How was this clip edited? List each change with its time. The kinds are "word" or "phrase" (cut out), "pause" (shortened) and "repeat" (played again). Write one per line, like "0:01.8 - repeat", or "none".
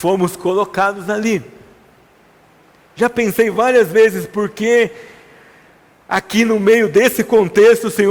none